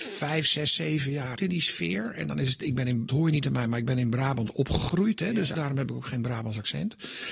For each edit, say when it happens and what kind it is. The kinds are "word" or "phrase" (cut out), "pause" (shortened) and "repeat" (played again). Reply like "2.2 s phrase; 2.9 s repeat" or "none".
1.4 s word; 3.1 s word; 5.5 s phrase